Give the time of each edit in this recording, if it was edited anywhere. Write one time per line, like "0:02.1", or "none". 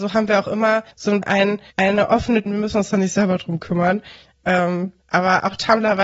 0:00.9
0:01.2
0:01.7
0:02.5
0:05.0